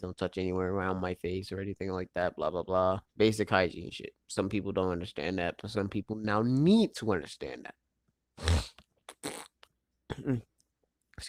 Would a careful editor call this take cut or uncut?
cut